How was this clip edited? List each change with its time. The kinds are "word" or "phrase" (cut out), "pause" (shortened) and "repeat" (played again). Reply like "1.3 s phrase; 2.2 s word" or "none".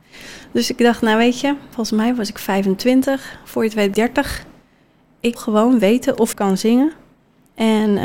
1.7 s word; 3.9 s word; 5.4 s word; 6.3 s word